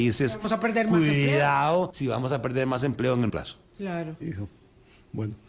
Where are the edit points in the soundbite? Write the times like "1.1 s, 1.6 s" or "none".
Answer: 1.9 s, 3.3 s